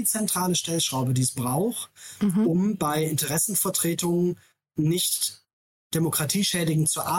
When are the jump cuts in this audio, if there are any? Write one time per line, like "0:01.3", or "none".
none